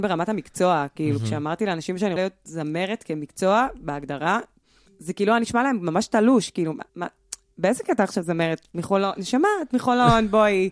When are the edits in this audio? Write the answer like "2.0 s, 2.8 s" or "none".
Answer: 2.2 s, 4.9 s, 6.9 s